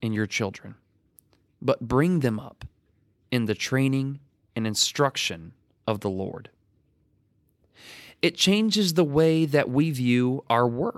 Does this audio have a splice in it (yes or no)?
no